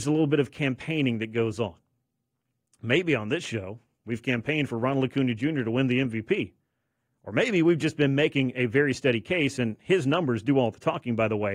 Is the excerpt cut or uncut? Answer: uncut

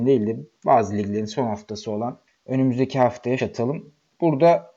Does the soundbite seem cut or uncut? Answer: cut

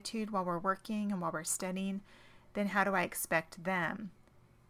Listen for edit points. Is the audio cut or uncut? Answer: uncut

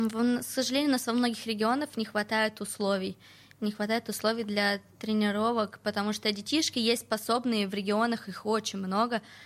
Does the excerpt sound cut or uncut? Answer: uncut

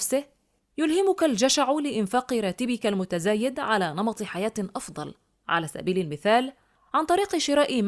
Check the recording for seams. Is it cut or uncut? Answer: uncut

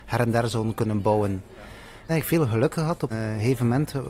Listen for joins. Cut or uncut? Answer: cut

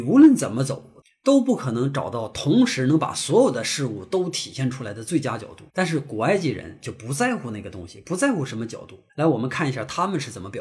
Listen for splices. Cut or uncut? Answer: cut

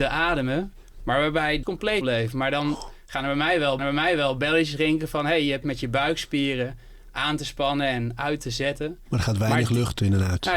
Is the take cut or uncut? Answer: cut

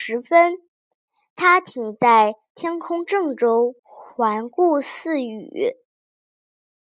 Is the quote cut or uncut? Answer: cut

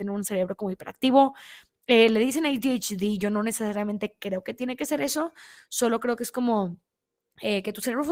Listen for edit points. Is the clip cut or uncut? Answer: uncut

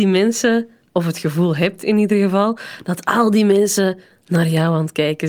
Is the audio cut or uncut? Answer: uncut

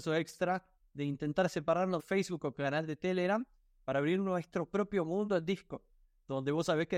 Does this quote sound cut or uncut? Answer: cut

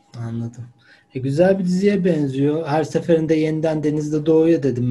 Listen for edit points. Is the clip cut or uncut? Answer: uncut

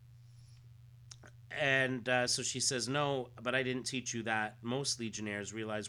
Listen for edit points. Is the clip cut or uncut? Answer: uncut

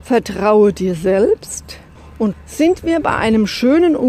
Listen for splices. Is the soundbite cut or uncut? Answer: cut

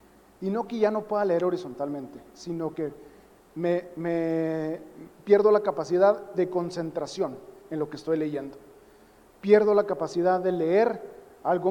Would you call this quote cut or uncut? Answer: uncut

